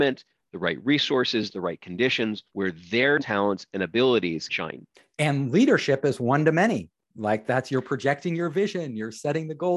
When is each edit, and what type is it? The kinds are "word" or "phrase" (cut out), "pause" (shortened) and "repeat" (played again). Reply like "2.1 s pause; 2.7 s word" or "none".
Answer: 2.5 s pause; 3.2 s word; 4.5 s word; 4.9 s pause

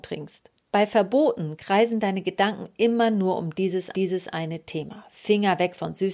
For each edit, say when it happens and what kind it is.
3.9 s repeat

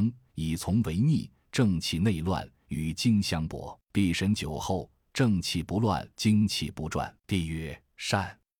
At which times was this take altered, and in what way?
3.8 s pause; 6.1 s pause; 7.2 s pause

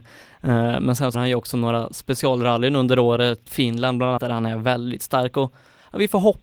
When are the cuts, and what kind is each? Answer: 1.1 s word; 3.5 s word; 4.2 s word

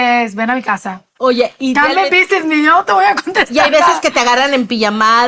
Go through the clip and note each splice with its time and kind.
none

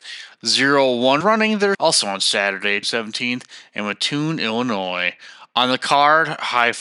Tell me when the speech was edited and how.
1.2 s phrase; 1.7 s phrase; 2.8 s word

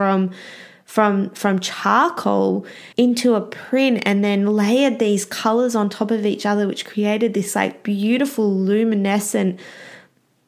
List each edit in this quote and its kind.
2.9 s pause

